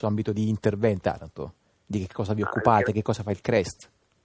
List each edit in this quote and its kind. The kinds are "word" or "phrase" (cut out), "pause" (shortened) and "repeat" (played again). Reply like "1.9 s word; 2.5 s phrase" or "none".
1.0 s phrase